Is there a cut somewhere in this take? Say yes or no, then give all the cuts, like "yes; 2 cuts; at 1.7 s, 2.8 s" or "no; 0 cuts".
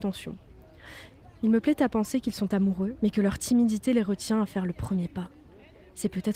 no; 0 cuts